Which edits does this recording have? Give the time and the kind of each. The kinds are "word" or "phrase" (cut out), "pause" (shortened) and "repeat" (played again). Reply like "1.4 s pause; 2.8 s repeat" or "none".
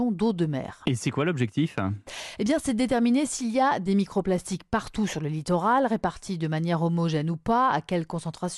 none

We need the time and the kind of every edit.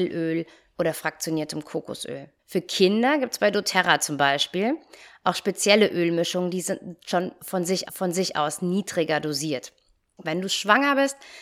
2.4 s pause; 7.9 s repeat

